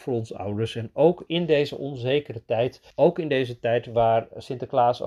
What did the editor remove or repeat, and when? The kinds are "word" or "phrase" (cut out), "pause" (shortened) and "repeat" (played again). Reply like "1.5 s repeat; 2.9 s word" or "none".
2.9 s pause